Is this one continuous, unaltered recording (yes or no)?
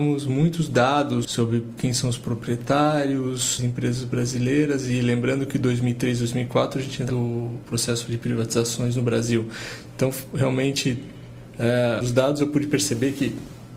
no